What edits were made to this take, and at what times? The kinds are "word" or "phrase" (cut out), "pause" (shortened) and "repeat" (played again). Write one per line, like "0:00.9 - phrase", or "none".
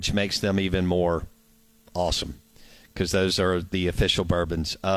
none